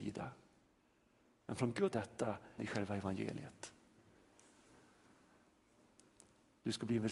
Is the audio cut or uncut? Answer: cut